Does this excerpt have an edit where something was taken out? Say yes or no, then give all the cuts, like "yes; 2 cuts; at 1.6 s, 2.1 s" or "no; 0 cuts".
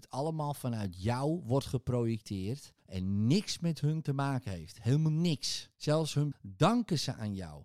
yes; 3 cuts; at 2.8 s, 5.7 s, 6.3 s